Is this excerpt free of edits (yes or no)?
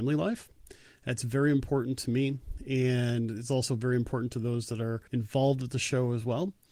no